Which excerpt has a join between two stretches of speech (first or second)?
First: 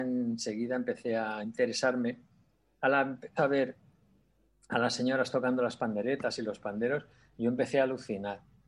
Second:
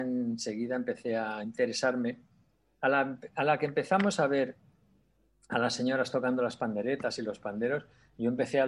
first